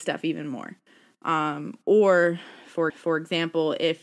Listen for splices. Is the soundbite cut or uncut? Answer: cut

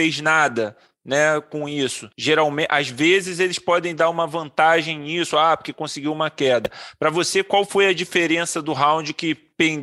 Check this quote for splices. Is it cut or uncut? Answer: cut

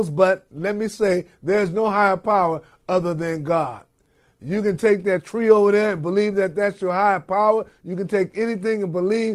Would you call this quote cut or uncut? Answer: uncut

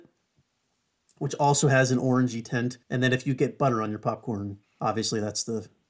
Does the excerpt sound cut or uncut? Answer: cut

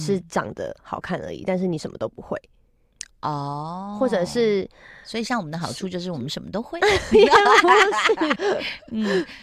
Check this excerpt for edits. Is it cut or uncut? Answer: cut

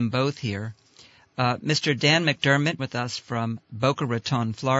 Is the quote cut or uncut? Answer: cut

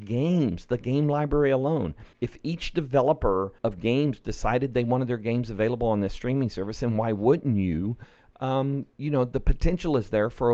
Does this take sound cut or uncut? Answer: cut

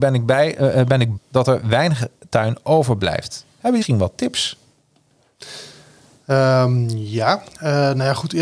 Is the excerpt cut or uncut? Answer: cut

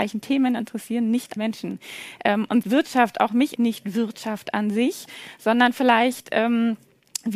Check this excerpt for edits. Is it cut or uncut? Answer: cut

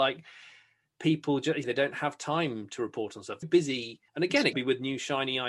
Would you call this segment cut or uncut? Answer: cut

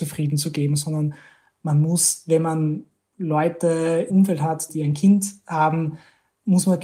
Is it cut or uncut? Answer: cut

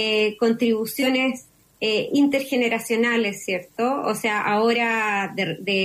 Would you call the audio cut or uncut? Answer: uncut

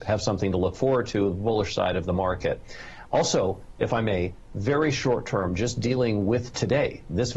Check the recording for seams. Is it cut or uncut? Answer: uncut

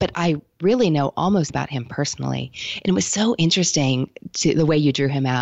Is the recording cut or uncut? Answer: cut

